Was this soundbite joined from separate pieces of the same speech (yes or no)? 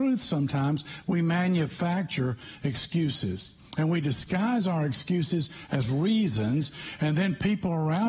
no